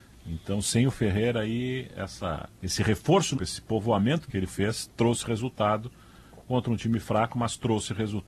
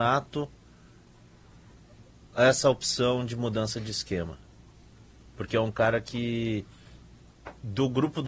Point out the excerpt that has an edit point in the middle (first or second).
first